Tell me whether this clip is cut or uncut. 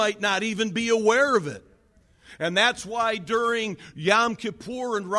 uncut